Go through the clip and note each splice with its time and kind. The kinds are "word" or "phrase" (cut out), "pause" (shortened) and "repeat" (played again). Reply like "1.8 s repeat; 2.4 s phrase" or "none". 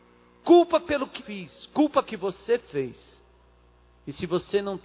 1.2 s word; 2.0 s word

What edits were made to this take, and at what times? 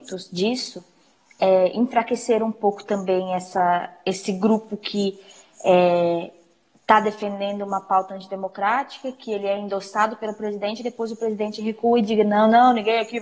none

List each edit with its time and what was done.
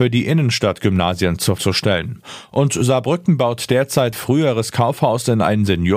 1.6 s word; 4.1 s word

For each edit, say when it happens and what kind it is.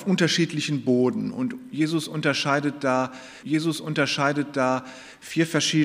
3.4 s repeat

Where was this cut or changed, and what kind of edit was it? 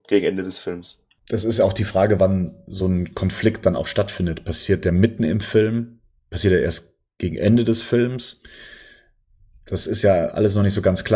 none

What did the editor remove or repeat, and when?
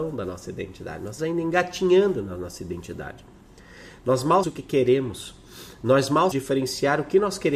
1.2 s word; 4.4 s word; 6.3 s word

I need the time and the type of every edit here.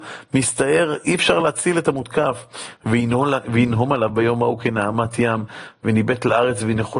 none

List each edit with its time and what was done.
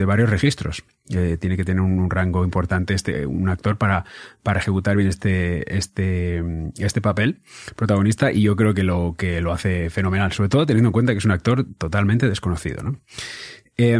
none

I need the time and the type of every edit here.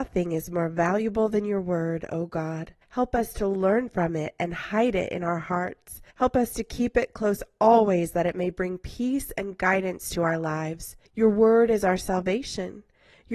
2.8 s pause; 6.1 s pause; 11.0 s pause

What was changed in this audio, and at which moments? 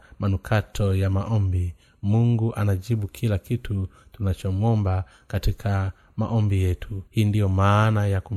7.1 s pause

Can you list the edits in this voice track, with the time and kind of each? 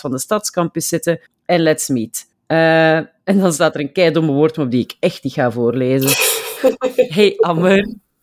1.3 s pause; 2.3 s pause

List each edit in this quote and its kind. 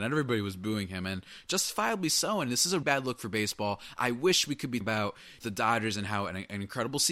2.8 s word; 4.8 s word; 5.4 s word

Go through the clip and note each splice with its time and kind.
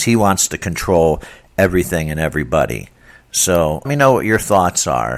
3.8 s word

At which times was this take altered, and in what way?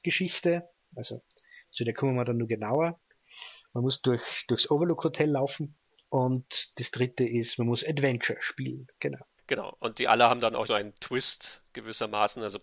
10.7 s phrase

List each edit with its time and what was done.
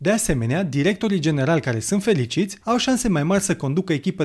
2.6 s pause

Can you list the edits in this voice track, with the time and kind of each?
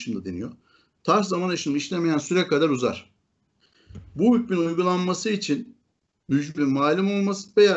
6.6 s word

